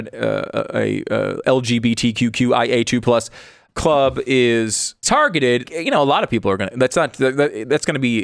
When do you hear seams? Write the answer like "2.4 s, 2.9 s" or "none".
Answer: 3.7 s, 5.0 s, 5.6 s